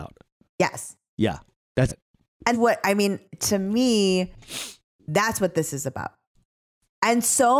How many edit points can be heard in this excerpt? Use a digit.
2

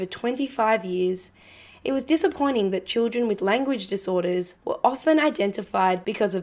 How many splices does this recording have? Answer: 1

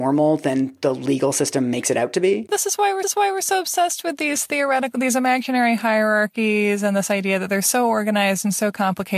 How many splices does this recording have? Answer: 1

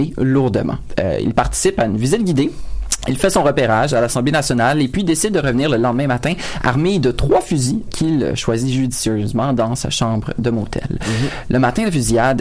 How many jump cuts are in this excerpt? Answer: 1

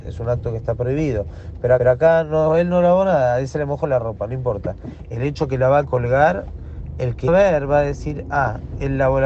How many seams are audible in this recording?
2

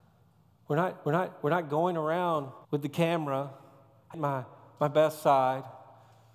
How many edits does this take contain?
3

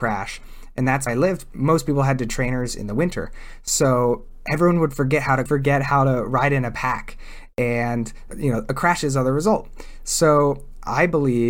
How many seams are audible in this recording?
4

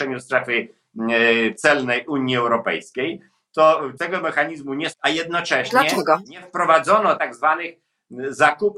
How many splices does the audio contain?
3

